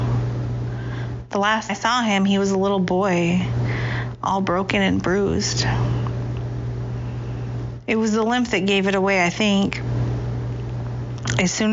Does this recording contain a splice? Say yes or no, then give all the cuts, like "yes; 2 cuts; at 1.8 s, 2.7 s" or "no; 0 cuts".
yes; 1 cut; at 1.7 s